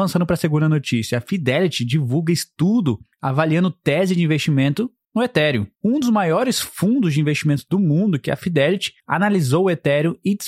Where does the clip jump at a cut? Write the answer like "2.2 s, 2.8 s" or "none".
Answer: 5.8 s